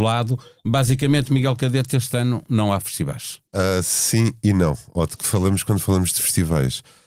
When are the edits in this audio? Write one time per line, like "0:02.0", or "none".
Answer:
0:03.5